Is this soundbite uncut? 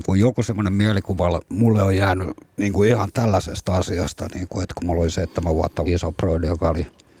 no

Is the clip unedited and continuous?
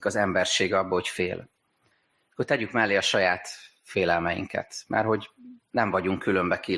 yes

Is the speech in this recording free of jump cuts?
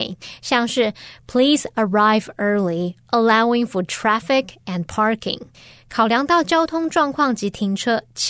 yes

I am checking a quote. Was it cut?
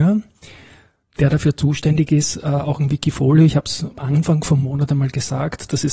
no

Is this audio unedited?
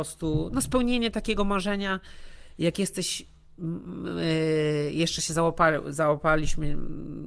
yes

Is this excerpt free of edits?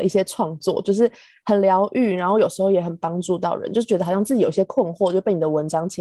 yes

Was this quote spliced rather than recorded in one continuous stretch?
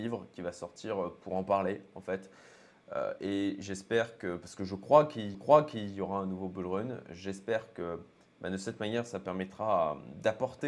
yes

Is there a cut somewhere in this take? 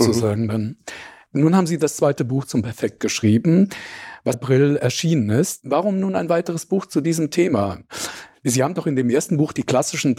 yes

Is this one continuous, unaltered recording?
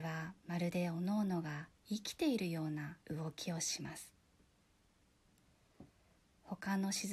no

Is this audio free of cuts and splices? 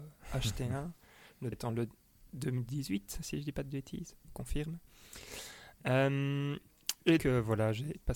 no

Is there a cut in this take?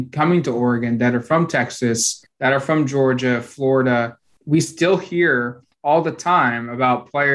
no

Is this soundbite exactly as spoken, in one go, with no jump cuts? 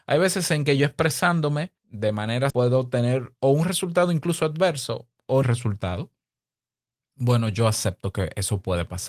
no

